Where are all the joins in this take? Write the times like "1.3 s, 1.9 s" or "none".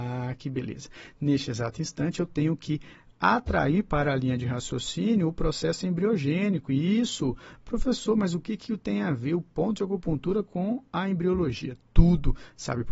none